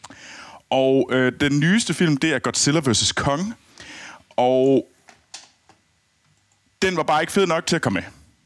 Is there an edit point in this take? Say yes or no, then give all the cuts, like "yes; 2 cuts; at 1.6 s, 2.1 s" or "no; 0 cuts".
no; 0 cuts